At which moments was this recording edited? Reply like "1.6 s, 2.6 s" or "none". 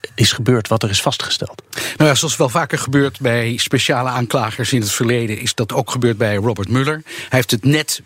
none

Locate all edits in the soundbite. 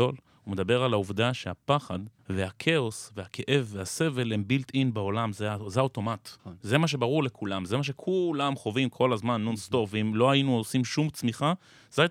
2.2 s, 6.4 s

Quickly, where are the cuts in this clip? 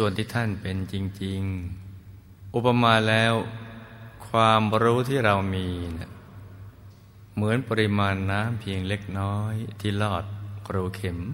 2.5 s

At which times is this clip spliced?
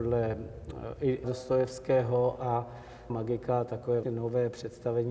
1.2 s, 3.1 s, 4.0 s

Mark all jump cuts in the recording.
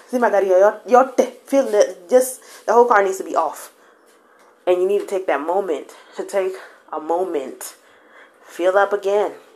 none

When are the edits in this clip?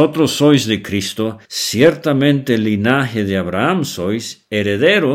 1.4 s

